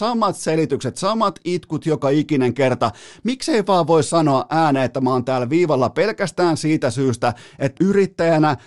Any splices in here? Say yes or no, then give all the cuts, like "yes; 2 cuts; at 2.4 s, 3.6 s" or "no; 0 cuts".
yes; 1 cut; at 7.8 s